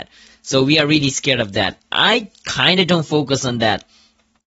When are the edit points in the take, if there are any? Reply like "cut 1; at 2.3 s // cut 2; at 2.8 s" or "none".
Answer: none